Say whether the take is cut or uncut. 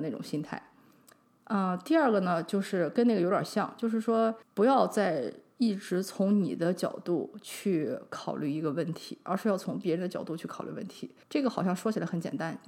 cut